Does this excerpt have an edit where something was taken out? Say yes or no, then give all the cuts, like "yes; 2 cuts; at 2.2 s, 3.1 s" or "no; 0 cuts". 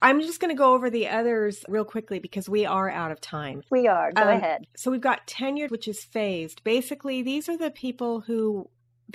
yes; 3 cuts; at 1.7 s, 3.7 s, 5.7 s